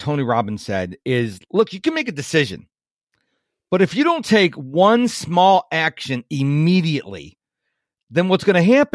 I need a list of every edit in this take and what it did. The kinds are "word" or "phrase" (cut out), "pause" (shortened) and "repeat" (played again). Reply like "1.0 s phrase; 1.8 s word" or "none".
none